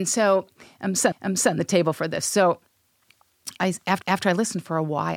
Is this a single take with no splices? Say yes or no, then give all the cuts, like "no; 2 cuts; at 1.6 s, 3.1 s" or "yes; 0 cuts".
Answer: no; 3 cuts; at 1.1 s, 3.5 s, 4.0 s